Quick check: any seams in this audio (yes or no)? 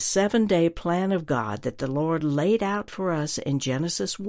no